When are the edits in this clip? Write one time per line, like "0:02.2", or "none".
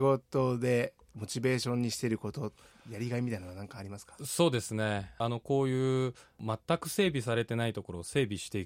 none